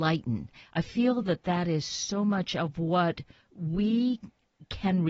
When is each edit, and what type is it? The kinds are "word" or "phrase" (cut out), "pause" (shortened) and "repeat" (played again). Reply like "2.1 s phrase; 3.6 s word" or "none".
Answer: none

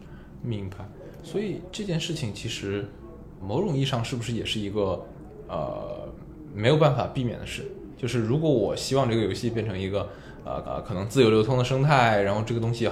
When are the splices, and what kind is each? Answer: 3.4 s word; 10.6 s repeat

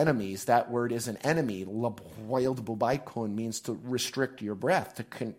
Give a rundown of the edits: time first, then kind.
none

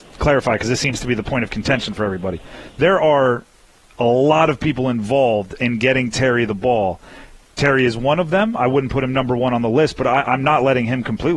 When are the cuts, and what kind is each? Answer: none

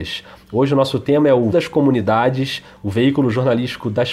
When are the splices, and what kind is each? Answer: 1.5 s word

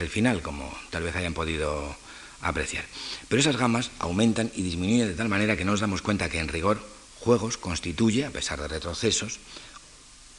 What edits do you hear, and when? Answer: 7.1 s pause

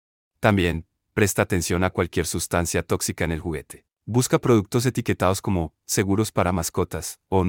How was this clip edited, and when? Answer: 3.9 s pause

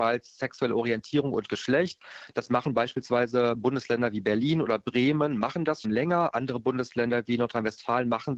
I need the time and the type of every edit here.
5.8 s word

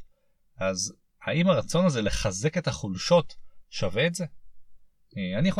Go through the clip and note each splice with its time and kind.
none

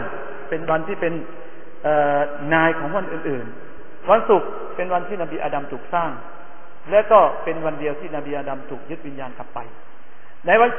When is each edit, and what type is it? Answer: none

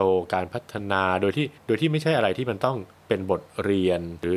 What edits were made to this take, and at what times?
1.6 s pause

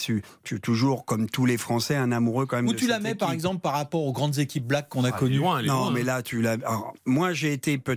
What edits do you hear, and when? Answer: 7.0 s pause

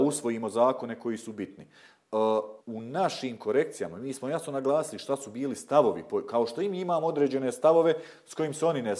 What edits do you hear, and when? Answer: 2.6 s pause

